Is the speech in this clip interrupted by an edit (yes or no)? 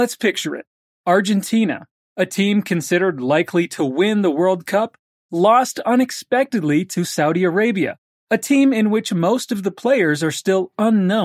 no